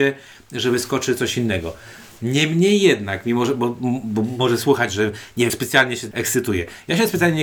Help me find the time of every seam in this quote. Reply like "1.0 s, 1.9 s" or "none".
5.5 s, 6.1 s